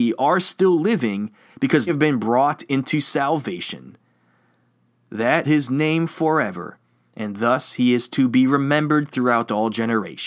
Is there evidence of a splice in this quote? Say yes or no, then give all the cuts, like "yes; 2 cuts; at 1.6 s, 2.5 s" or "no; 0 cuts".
yes; 2 cuts; at 1.9 s, 5.4 s